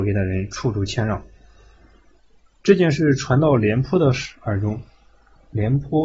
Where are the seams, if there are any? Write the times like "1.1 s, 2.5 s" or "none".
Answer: none